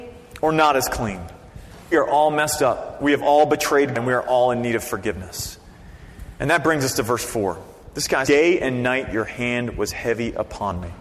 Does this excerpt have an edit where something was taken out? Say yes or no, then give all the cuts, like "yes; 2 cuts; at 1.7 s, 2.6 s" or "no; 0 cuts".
yes; 3 cuts; at 1.9 s, 3.9 s, 8.2 s